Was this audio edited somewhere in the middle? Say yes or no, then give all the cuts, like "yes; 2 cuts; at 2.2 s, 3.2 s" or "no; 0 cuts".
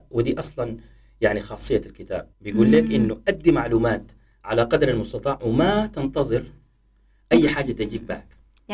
yes; 1 cut; at 2.3 s